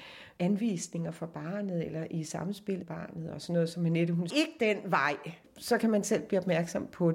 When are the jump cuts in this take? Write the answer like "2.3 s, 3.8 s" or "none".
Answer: 2.8 s, 4.3 s

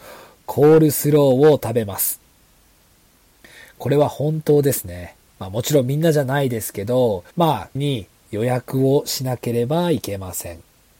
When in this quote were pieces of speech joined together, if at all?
5.3 s, 7.3 s, 7.8 s

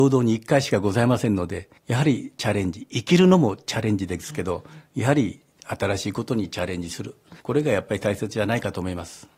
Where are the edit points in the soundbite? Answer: 1.8 s, 7.4 s

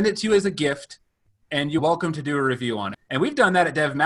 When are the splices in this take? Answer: 1.8 s, 2.9 s

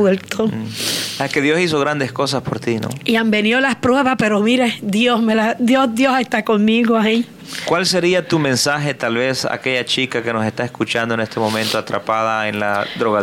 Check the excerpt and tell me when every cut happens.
none

